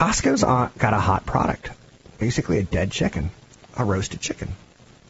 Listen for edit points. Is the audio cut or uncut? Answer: uncut